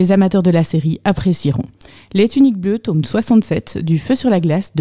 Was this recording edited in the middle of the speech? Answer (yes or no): no